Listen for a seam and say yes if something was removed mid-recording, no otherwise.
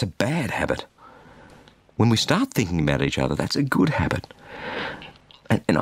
no